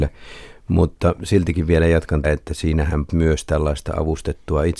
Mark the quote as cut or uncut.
cut